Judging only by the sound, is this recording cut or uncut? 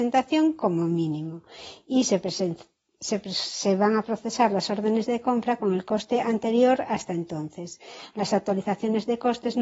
uncut